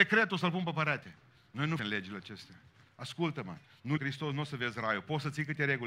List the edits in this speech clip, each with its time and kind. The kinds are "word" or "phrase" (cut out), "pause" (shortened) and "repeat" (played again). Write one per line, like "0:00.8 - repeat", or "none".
0:01.8 - word
0:04.0 - word